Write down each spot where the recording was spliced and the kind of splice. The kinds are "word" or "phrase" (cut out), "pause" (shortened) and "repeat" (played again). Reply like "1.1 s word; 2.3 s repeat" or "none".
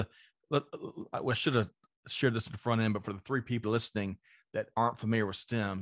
3.6 s word